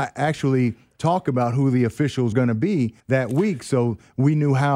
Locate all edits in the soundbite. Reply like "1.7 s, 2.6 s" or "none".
2.3 s, 3.0 s

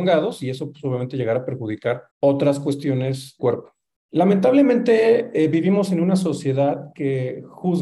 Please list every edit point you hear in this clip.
2.1 s, 3.4 s, 4.0 s

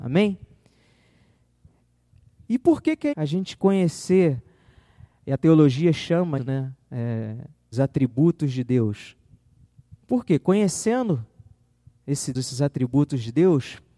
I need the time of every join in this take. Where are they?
3.1 s, 6.4 s, 7.7 s, 10.0 s, 12.3 s

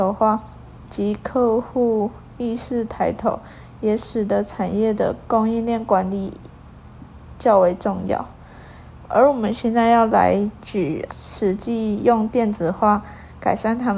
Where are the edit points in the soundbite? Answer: 11.1 s

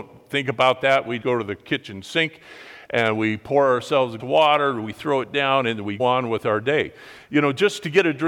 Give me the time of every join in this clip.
1.2 s, 4.2 s, 6.0 s

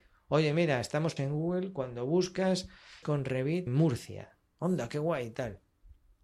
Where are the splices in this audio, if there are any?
1.2 s, 3.0 s, 3.7 s

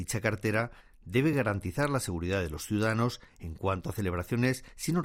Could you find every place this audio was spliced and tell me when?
none

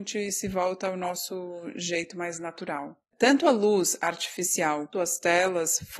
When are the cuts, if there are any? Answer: 3.0 s, 4.9 s

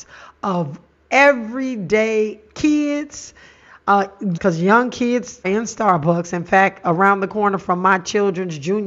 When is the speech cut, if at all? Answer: 4.4 s, 5.4 s

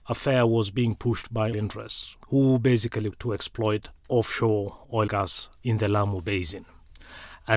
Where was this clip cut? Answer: 1.5 s, 2.2 s, 3.1 s, 5.1 s

